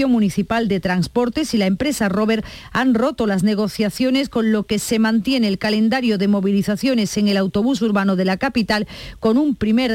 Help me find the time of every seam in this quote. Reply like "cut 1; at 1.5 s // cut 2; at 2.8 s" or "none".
none